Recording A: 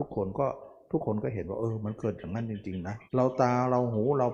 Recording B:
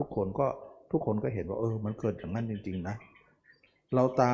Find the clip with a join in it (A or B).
A